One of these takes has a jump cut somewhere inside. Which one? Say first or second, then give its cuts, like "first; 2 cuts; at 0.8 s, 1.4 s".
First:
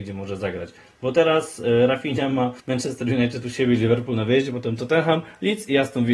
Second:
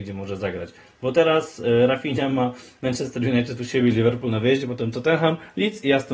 first; 1 cut; at 2.6 s